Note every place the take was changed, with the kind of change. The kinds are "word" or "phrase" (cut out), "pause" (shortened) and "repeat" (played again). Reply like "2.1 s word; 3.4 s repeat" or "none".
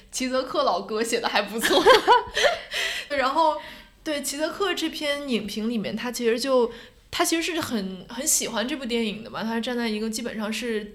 3.1 s word